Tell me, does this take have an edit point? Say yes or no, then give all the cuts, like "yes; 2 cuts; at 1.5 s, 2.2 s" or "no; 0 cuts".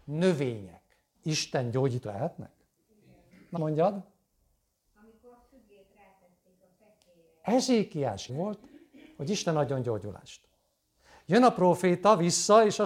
yes; 4 cuts; at 1.1 s, 2.0 s, 3.6 s, 8.3 s